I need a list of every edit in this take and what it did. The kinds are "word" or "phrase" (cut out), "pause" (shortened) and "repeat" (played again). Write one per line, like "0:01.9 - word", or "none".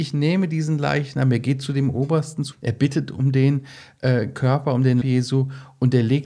0:02.5 - phrase
0:05.0 - word